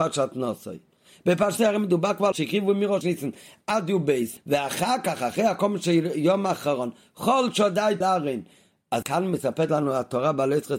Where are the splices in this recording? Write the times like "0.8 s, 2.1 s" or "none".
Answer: 1.6 s, 2.3 s, 3.0 s, 4.4 s, 8.0 s, 9.0 s